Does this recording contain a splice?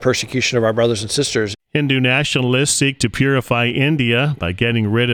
no; 0 cuts

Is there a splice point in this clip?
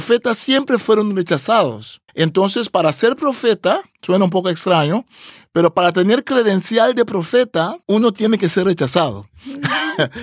yes; 3 cuts; at 2.1 s, 3.9 s, 7.8 s

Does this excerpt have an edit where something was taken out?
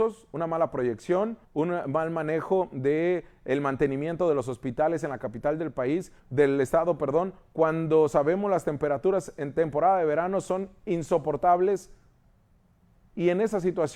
yes; 2 cuts; at 1.4 s, 6.2 s

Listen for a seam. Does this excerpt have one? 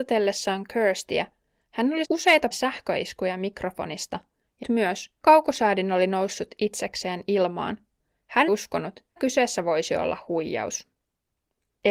yes; 6 cuts; at 2.0 s, 2.5 s, 4.6 s, 5.2 s, 8.5 s, 9.2 s

